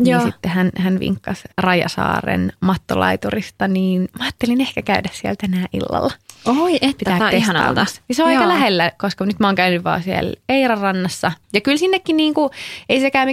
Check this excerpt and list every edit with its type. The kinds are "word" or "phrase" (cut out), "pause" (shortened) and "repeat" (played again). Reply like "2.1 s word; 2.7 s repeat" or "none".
1.5 s pause; 7.2 s word; 11.4 s pause